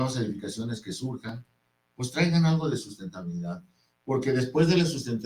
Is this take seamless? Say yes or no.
yes